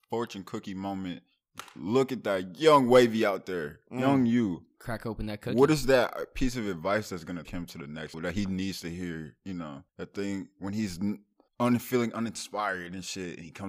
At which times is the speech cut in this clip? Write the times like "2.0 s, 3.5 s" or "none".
7.4 s, 8.1 s, 9.9 s, 11.5 s